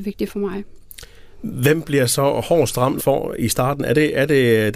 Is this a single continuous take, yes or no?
no